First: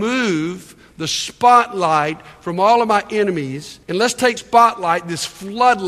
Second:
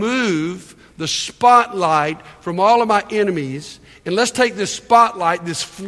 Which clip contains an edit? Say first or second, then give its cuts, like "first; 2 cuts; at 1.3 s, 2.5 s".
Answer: first; 2 cuts; at 3.8 s, 4.4 s